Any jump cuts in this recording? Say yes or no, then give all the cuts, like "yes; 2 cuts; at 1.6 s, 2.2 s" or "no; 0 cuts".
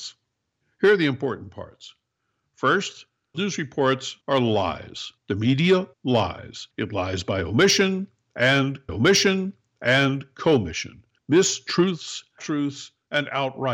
yes; 6 cuts; at 3.3 s, 4.2 s, 5.2 s, 5.9 s, 8.9 s, 12.4 s